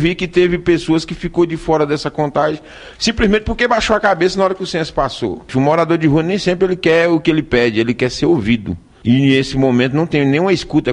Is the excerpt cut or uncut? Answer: uncut